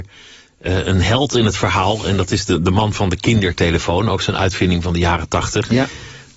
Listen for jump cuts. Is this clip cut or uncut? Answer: uncut